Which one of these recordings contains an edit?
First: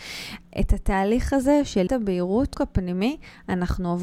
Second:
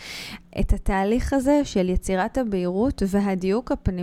first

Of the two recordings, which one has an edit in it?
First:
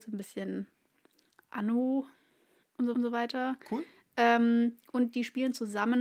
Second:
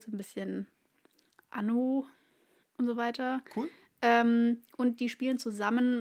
first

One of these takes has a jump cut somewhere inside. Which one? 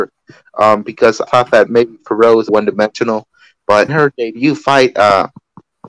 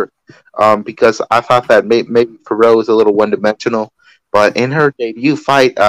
first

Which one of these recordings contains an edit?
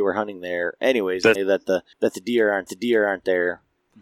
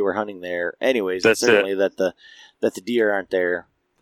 first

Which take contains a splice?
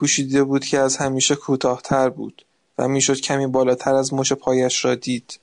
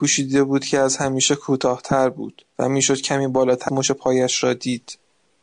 second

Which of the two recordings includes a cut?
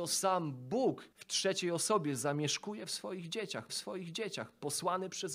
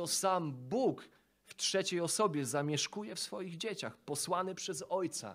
first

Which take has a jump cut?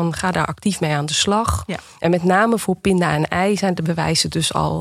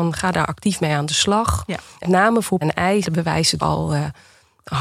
second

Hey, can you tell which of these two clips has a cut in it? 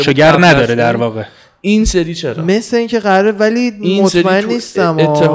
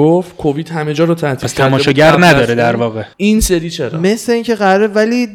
second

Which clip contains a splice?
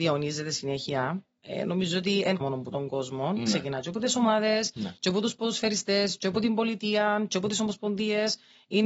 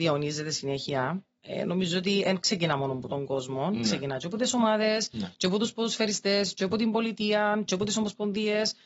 first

